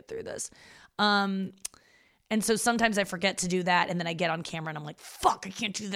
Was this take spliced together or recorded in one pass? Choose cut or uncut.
uncut